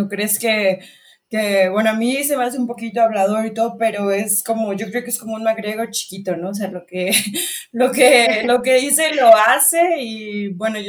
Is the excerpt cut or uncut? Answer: uncut